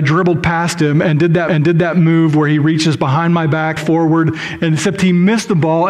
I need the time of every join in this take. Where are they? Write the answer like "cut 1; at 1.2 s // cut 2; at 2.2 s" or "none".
cut 1; at 1.5 s // cut 2; at 3.8 s